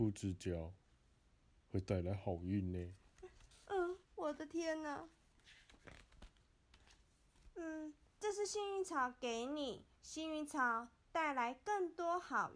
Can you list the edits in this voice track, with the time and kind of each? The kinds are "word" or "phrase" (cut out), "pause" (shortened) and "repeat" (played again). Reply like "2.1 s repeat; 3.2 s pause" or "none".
4.0 s pause; 10.0 s pause